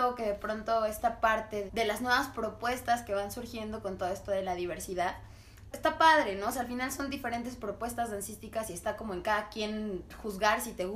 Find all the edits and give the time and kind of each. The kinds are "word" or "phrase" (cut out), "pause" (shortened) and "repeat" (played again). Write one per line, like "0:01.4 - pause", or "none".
0:01.7 - word
0:05.7 - word